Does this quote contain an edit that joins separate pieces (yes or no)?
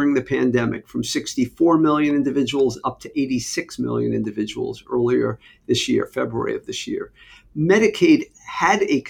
no